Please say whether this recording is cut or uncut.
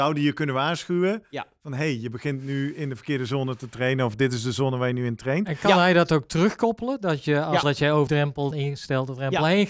cut